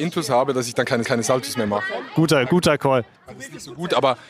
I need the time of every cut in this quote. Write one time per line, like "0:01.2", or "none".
0:01.0
0:02.4
0:03.1